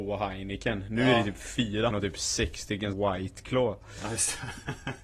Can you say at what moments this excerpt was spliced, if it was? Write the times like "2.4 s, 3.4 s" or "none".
1.9 s, 2.9 s